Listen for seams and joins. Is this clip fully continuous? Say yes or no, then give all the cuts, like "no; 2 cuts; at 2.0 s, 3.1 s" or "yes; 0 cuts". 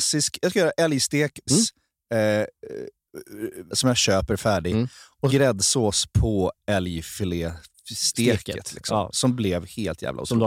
no; 3 cuts; at 1.5 s, 3.7 s, 5.3 s